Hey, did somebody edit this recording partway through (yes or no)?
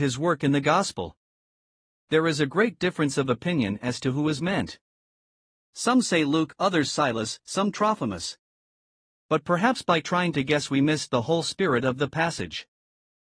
no